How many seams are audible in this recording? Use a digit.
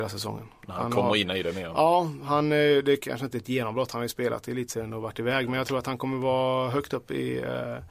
0